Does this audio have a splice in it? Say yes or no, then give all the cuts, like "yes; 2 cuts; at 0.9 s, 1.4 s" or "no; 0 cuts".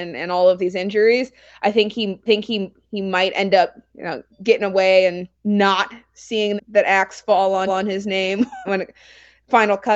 yes; 6 cuts; at 2.3 s, 4.3 s, 5.3 s, 6.6 s, 7.7 s, 8.6 s